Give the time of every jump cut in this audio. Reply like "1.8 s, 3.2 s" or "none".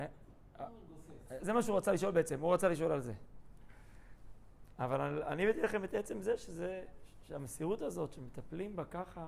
1.4 s